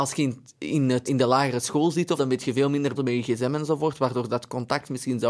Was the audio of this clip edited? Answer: yes; 3 cuts; at 1.1 s, 2.2 s, 3.0 s

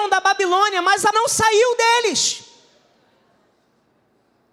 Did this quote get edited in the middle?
yes; 1 cut; at 1.1 s

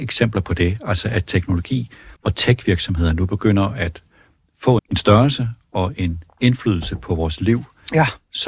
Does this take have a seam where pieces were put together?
yes; 2 cuts; at 2.2 s, 4.8 s

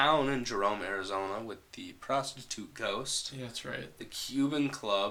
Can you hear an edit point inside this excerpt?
no; 0 cuts

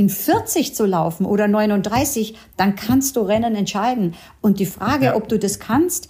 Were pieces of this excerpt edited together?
no; 0 cuts

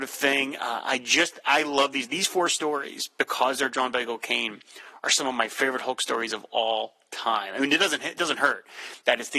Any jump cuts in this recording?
no; 0 cuts

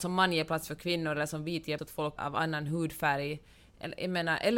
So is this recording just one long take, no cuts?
no; 2 cuts; at 1.8 s, 2.2 s

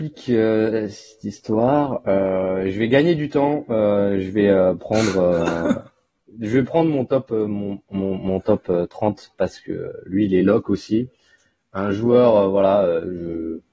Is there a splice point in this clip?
no; 0 cuts

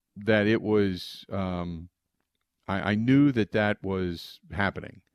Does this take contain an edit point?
no; 0 cuts

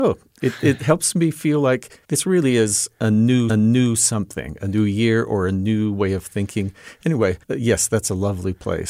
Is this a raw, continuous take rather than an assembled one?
no; 3 cuts; at 2.0 s, 3.5 s, 7.4 s

